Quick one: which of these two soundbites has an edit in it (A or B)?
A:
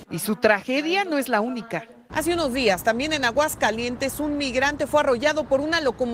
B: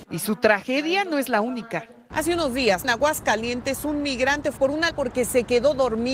B